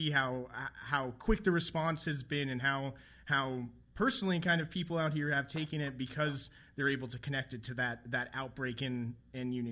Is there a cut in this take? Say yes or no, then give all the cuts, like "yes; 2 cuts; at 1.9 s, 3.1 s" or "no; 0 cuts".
no; 0 cuts